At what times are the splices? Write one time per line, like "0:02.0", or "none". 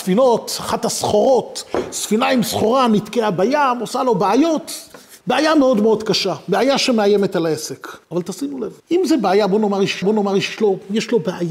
0:05.2
0:08.0
0:08.8
0:10.0